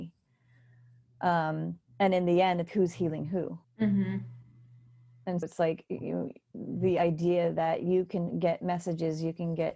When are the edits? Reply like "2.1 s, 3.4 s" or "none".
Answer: 1.9 s, 2.7 s, 3.6 s, 5.4 s